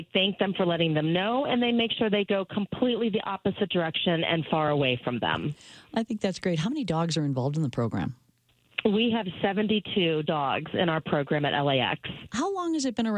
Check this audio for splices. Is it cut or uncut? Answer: uncut